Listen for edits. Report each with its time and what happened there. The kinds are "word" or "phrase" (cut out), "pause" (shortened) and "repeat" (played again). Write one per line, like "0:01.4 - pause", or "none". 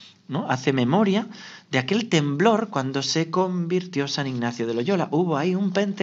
none